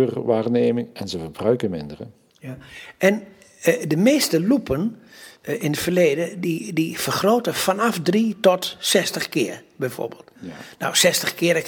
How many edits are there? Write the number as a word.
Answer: one